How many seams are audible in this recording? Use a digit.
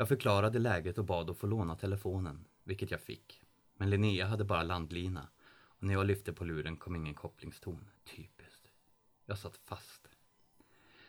1